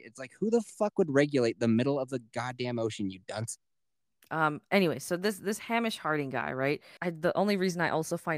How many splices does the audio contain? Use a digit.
1